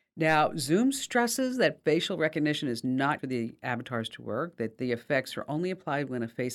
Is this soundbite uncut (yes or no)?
no